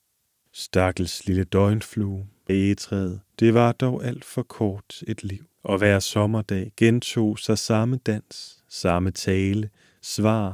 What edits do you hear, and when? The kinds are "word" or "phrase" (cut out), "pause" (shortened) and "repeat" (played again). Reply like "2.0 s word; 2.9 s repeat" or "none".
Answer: 2.5 s word; 3.3 s pause; 5.5 s pause

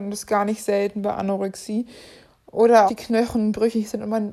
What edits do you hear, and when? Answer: 2.9 s word

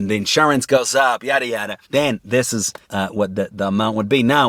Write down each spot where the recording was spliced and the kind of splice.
1.8 s pause; 2.8 s pause

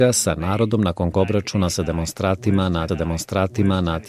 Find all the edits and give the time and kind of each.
1.1 s word; 2.9 s repeat

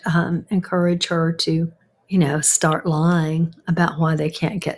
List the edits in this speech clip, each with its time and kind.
1.8 s pause

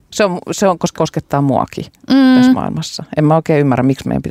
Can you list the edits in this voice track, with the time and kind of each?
0.9 s word

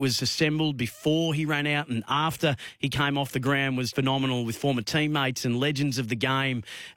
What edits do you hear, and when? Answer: 3.9 s word

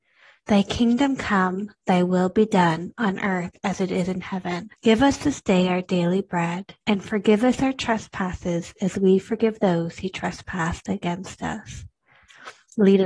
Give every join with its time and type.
4.8 s pause; 6.8 s pause

